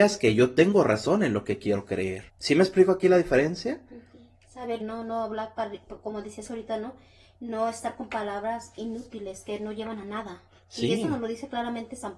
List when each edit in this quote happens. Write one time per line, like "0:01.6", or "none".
0:02.3
0:04.8